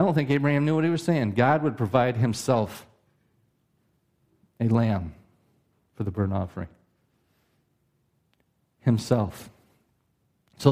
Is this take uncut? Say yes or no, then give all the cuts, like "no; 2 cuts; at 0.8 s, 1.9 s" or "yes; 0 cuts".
yes; 0 cuts